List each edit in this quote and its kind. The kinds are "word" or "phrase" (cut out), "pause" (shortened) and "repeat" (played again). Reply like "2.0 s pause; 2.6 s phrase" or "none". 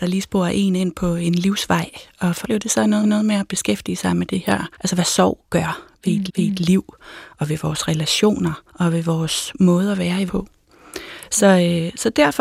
2.4 s word; 3.0 s repeat; 4.7 s pause; 6.3 s repeat; 8.7 s pause; 10.3 s word